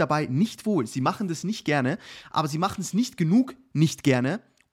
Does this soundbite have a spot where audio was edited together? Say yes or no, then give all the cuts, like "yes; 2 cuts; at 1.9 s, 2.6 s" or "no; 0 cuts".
no; 0 cuts